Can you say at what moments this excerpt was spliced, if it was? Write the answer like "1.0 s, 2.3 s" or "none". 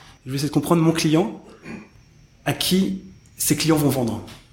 none